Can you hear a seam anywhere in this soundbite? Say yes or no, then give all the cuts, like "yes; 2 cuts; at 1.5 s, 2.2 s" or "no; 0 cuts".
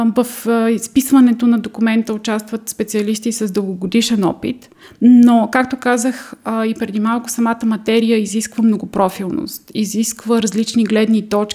no; 0 cuts